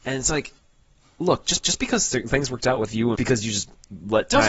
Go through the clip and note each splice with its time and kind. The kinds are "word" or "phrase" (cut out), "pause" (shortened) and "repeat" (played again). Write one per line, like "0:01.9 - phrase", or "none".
0:01.6 - repeat
0:03.2 - phrase